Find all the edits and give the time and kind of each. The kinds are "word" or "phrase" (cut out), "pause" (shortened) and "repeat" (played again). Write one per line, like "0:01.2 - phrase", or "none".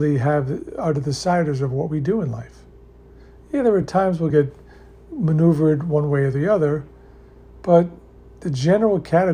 none